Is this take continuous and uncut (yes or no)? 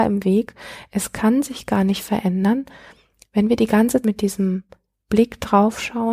no